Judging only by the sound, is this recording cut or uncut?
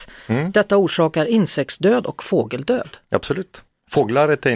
uncut